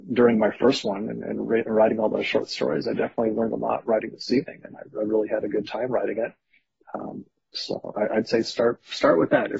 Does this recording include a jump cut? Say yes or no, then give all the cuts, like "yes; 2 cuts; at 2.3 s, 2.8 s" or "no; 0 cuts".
no; 0 cuts